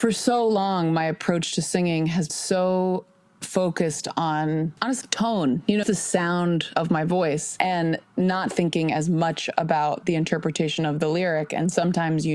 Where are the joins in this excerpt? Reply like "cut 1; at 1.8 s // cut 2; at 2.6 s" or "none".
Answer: cut 1; at 2.3 s // cut 2; at 5.0 s // cut 3; at 5.8 s